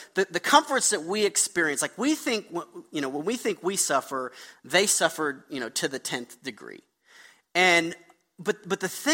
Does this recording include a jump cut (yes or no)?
no